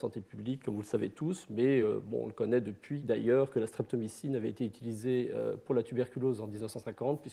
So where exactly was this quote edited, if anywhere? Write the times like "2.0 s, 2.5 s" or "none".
none